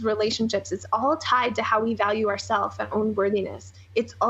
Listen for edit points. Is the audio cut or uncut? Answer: cut